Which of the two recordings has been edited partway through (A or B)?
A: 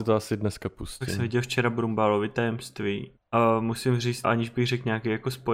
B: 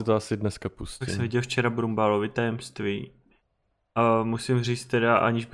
A